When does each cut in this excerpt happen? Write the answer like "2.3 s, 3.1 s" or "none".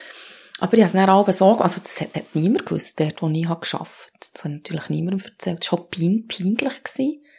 2.1 s

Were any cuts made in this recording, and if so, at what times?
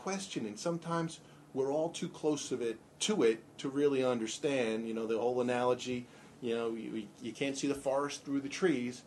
none

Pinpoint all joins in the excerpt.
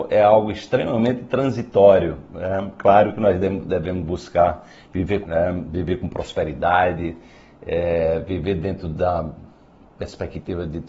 5.2 s

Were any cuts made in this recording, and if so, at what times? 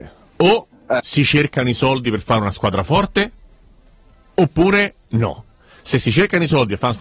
none

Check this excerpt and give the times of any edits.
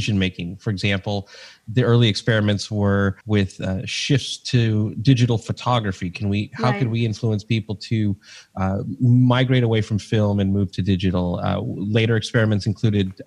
3.2 s

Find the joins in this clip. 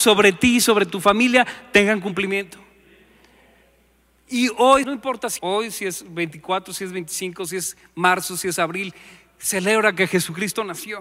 4.8 s, 5.4 s

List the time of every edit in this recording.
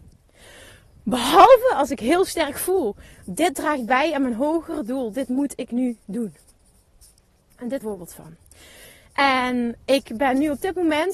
7.8 s

